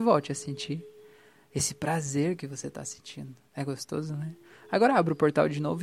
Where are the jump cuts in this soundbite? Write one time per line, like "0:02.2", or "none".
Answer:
0:03.4